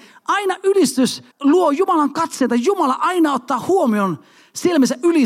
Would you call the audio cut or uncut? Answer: cut